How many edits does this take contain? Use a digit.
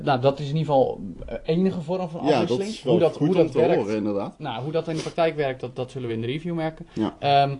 0